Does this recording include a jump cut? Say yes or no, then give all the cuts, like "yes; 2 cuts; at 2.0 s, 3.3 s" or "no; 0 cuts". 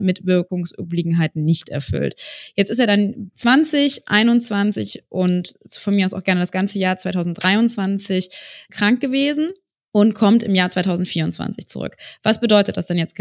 no; 0 cuts